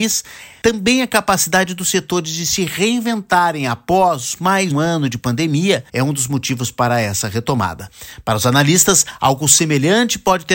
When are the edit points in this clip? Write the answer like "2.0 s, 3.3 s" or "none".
4.7 s, 5.9 s